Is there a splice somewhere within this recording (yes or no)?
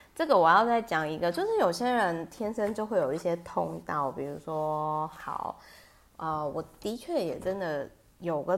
no